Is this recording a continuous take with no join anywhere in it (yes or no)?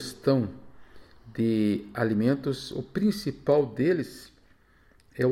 yes